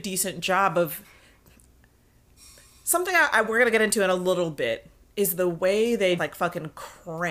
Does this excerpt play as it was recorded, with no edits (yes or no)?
no